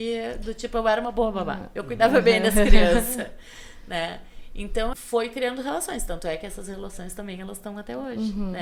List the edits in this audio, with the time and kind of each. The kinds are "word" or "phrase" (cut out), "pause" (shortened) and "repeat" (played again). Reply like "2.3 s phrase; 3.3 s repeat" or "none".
4.9 s word